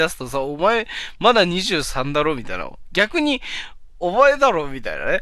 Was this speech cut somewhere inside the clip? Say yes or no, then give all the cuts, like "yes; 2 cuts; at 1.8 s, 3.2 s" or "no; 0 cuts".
yes; 1 cut; at 4.0 s